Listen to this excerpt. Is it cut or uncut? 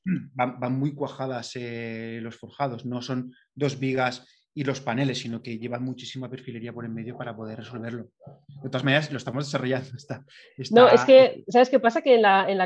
uncut